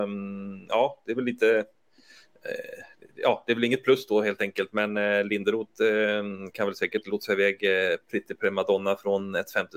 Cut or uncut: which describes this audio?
uncut